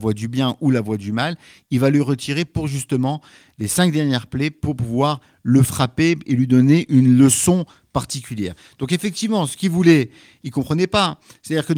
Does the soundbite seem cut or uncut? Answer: uncut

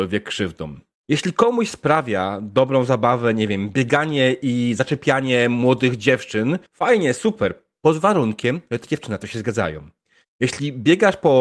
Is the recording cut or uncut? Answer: cut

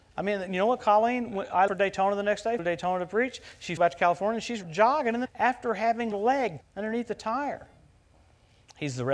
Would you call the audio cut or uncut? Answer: cut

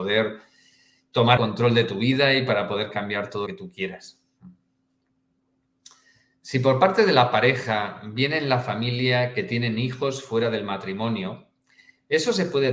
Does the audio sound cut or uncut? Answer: cut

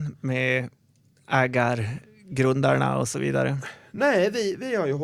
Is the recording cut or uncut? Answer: uncut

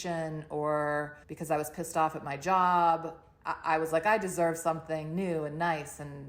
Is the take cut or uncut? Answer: cut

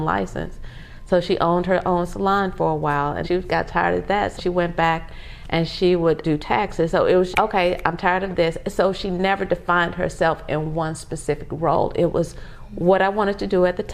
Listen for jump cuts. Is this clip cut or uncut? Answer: cut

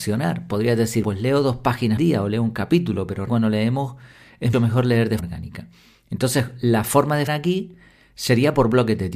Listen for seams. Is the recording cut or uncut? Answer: cut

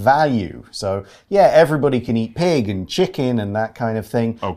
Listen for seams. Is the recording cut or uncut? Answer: uncut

